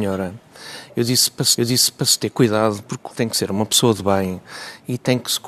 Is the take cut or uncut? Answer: cut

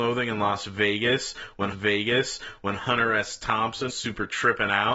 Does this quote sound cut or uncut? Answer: cut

